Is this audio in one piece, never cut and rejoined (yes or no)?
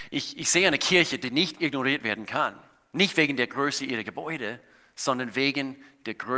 yes